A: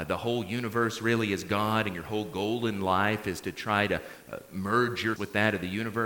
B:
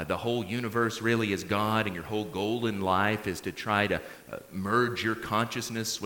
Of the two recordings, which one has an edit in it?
A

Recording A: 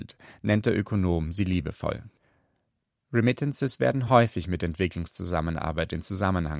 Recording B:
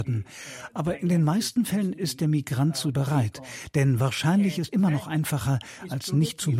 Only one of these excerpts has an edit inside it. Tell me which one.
B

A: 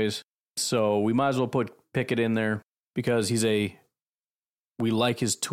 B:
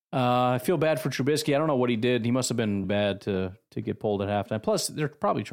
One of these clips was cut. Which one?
B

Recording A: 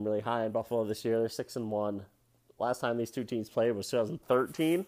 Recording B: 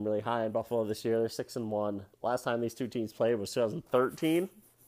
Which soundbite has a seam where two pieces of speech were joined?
B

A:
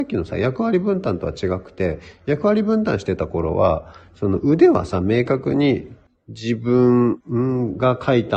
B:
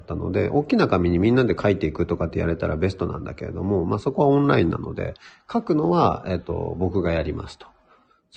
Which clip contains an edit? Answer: A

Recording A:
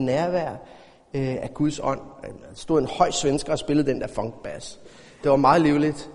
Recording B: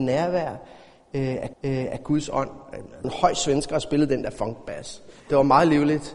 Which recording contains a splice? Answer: B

